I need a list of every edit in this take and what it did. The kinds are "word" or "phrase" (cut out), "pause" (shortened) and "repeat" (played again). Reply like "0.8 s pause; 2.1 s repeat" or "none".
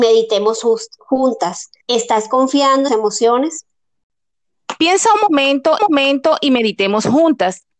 1.8 s pause; 2.9 s phrase; 5.8 s repeat